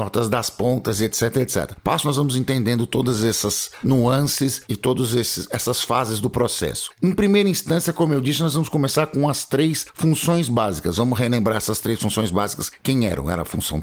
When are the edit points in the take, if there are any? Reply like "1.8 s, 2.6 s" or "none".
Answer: 2.0 s